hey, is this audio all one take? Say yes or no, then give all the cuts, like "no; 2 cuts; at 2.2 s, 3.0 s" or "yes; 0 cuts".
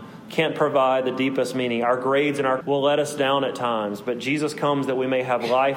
no; 1 cut; at 2.6 s